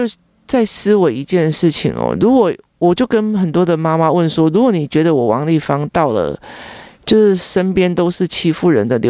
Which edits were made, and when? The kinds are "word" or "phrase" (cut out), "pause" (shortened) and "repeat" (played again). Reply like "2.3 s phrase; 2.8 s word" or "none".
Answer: none